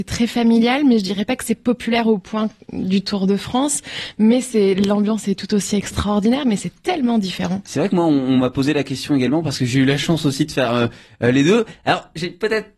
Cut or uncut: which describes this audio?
uncut